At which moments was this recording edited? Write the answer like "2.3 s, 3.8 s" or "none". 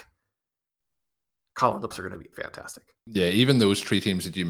1.9 s, 2.3 s, 3.0 s